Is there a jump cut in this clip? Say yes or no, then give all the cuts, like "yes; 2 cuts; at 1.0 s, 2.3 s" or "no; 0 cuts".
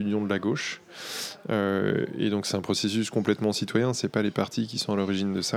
no; 0 cuts